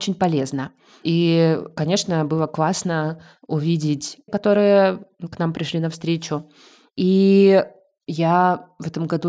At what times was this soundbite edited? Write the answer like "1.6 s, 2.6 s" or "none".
4.3 s